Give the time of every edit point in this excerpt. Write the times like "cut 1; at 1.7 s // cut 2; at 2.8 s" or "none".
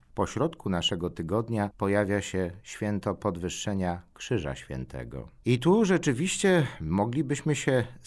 cut 1; at 5.4 s